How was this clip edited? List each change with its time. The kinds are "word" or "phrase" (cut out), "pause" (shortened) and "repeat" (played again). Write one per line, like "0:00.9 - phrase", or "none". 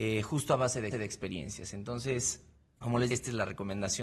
0:00.9 - repeat
0:02.7 - pause
0:03.1 - word